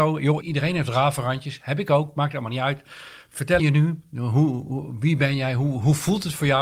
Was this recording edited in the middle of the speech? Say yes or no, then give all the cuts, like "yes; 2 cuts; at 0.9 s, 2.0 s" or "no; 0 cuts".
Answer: yes; 1 cut; at 3.6 s